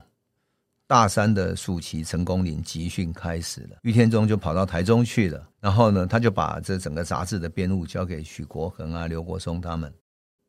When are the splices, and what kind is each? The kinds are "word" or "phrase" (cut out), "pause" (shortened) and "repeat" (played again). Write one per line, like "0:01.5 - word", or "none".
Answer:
0:03.8 - pause
0:05.5 - pause